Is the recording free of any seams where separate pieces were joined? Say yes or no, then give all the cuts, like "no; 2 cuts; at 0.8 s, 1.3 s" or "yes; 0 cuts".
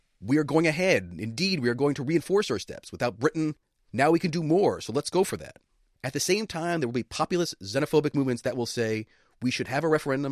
yes; 0 cuts